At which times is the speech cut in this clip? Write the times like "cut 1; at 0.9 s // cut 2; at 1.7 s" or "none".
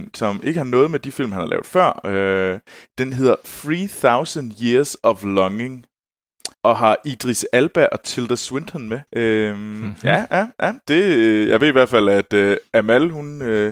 cut 1; at 6.5 s // cut 2; at 9.1 s